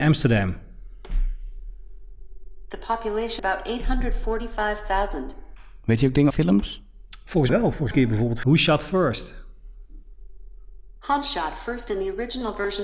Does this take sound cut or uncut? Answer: cut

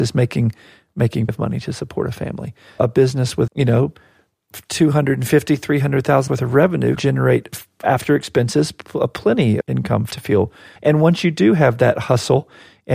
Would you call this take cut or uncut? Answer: cut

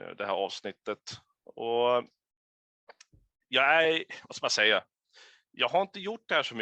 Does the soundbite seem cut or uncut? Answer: uncut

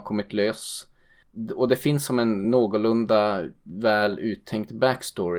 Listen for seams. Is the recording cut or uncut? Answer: uncut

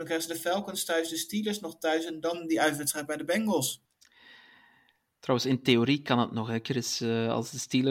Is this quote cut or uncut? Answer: uncut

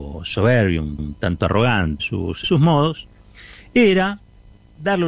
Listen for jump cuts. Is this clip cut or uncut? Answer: cut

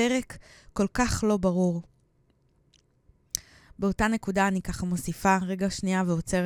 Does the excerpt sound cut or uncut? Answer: uncut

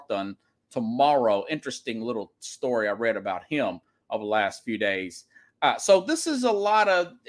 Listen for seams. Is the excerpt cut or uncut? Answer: uncut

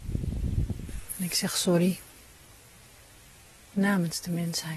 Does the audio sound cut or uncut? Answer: uncut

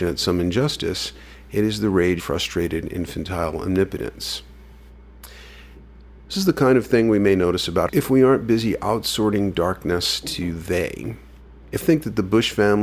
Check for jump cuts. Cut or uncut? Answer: cut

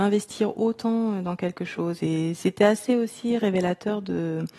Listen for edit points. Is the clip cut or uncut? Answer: uncut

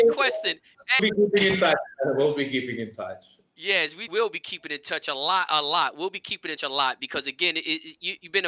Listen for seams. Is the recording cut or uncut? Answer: cut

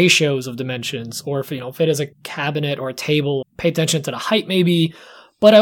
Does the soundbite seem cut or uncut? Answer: cut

